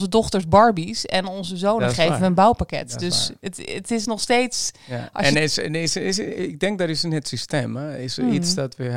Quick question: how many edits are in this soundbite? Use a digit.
0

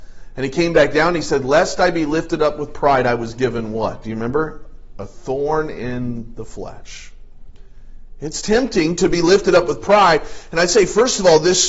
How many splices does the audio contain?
0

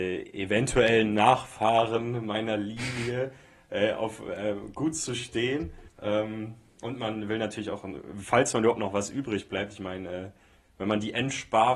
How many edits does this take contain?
1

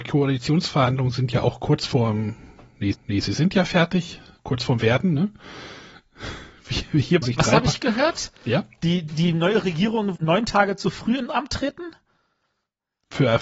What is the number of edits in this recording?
5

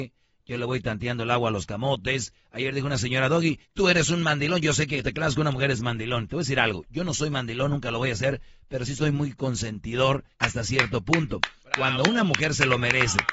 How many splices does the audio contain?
3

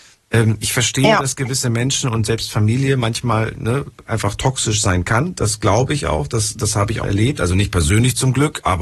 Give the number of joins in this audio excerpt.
1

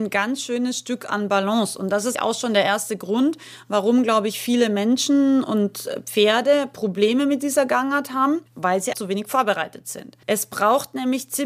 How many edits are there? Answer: 3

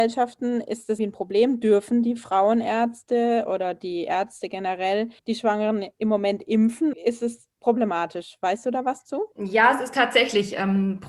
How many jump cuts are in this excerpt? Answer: 4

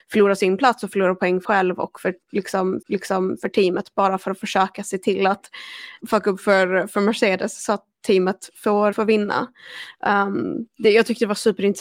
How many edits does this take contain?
4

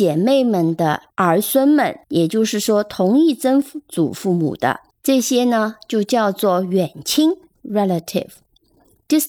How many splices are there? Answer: 4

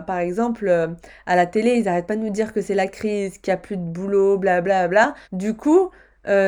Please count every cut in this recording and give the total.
1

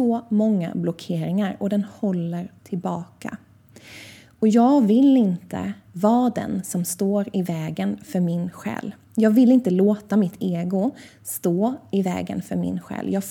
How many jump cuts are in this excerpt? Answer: 1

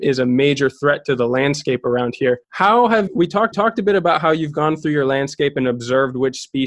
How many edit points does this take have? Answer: 3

